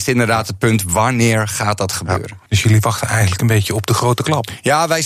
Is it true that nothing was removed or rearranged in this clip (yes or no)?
no